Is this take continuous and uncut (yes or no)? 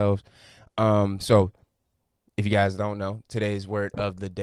yes